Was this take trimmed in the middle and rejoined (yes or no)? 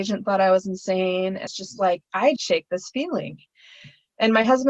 yes